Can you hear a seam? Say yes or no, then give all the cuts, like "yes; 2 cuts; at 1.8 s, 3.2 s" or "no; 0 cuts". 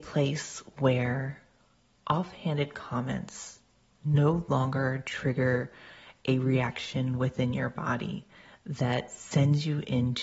no; 0 cuts